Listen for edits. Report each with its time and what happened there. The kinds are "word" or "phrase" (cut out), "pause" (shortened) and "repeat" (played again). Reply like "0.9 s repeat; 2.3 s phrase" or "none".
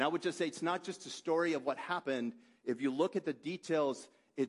none